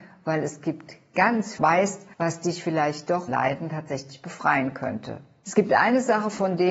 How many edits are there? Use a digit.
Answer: 3